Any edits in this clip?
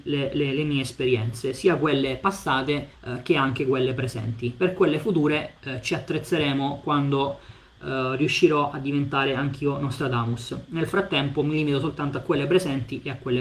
yes; 1 cut; at 3.0 s

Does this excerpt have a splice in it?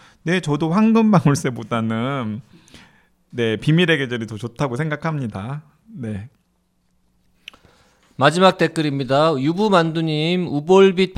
no; 0 cuts

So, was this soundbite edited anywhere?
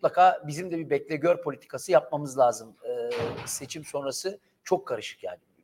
no; 0 cuts

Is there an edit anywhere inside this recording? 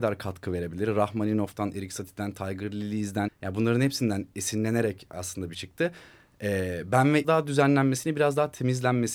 yes; 3 cuts; at 3.3 s, 5.5 s, 7.2 s

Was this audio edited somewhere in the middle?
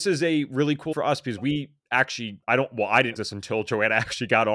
yes; 2 cuts; at 0.9 s, 3.2 s

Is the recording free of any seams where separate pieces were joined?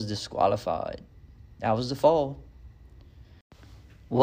yes; 0 cuts

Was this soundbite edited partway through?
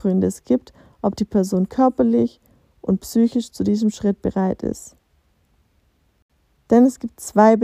no; 0 cuts

